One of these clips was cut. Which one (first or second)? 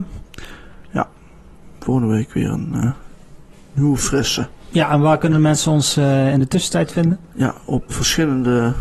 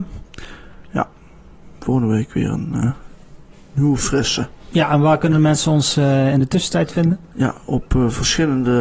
first